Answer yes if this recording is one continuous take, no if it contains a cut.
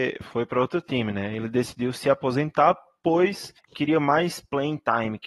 no